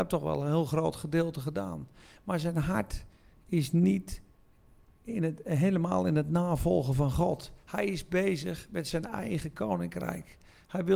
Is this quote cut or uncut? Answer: uncut